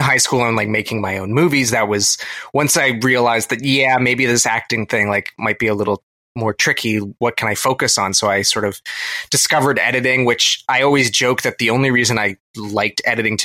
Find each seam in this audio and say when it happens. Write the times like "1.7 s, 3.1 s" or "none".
none